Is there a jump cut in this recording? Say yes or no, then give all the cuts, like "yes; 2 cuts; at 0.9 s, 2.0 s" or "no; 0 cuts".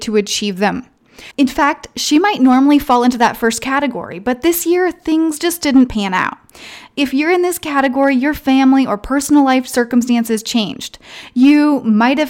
yes; 1 cut; at 1.3 s